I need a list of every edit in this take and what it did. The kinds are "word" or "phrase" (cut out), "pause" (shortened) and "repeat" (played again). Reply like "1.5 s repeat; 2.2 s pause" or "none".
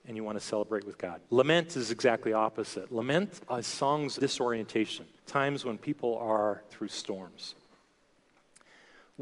1.2 s pause; 4.2 s word; 5.2 s pause; 6.7 s phrase